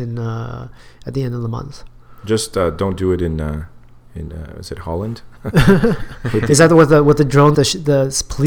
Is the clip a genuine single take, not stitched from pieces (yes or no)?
no